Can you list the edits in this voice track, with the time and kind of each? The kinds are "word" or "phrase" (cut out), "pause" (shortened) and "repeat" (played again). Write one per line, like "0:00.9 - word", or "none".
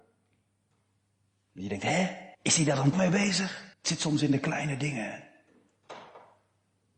0:02.3 - pause
0:02.9 - word
0:03.7 - pause

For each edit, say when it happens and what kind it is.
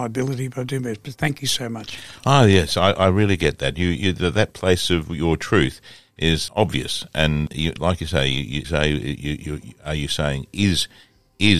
0:08.6 - phrase

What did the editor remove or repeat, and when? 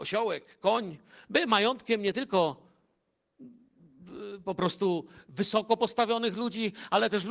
none

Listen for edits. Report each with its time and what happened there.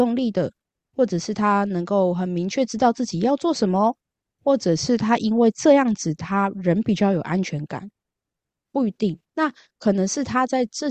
0:09.3 - pause

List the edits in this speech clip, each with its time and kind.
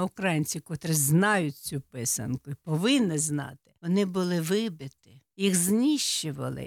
0:03.8 - pause
0:05.3 - pause

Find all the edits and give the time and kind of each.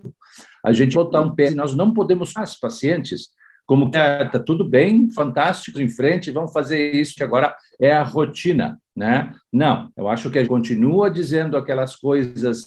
0:00.9 - word
0:01.5 - word
0:02.4 - word
0:03.9 - phrase
0:04.3 - word
0:05.7 - word
0:07.2 - phrase
0:09.9 - pause
0:10.4 - word

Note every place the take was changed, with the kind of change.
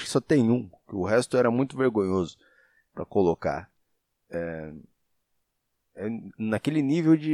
0:04.0 - pause

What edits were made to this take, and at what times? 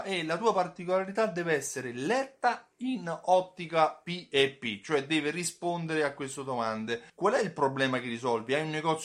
0:07.1 - pause

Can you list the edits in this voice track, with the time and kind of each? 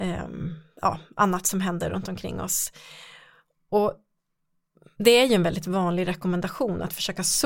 none

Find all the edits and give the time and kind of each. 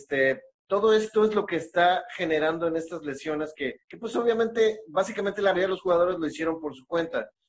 0:03.8 - pause
0:05.5 - word

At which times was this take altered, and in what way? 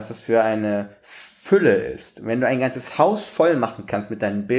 none

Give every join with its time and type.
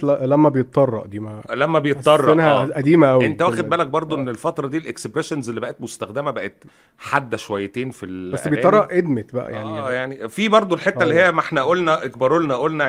none

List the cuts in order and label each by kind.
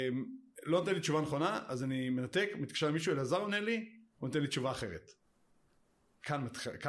none

